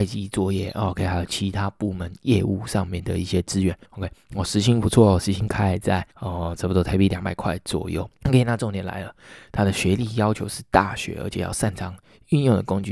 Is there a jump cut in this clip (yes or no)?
yes